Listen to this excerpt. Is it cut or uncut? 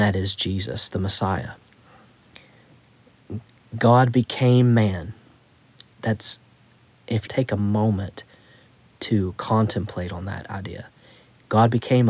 cut